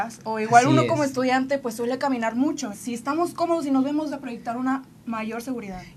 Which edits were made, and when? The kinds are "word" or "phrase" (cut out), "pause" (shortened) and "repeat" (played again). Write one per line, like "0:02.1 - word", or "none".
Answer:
0:02.7 - word
0:04.1 - phrase